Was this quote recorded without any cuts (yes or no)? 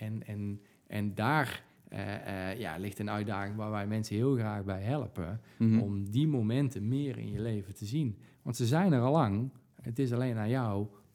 yes